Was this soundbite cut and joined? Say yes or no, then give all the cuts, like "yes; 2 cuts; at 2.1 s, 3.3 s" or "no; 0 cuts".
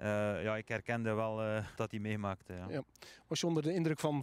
yes; 1 cut; at 1.8 s